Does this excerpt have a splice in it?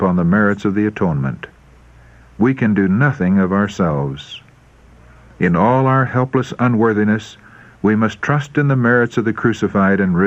no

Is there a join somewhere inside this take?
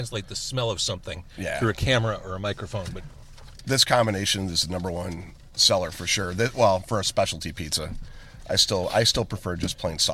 no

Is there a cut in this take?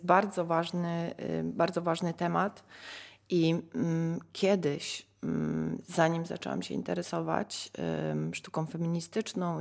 no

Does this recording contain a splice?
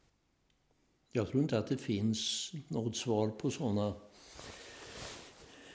no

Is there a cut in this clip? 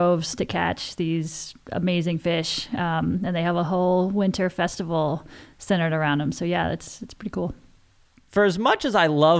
no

